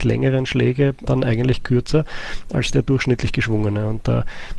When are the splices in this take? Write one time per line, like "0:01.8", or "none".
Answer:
0:01.1